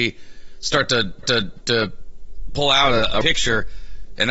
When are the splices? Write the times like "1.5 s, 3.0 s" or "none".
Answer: 1.2 s, 3.2 s